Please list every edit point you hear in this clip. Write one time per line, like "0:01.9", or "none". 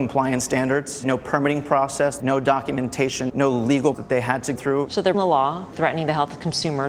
0:01.0
0:02.2
0:03.3
0:03.9
0:04.6
0:05.1
0:05.7